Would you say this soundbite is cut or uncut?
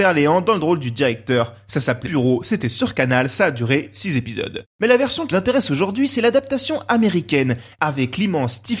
cut